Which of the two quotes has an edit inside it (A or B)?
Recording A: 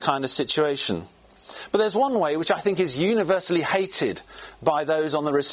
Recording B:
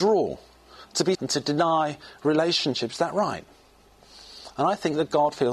B